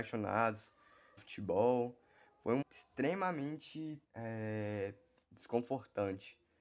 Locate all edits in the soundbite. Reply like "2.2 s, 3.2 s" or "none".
1.2 s, 2.6 s, 4.0 s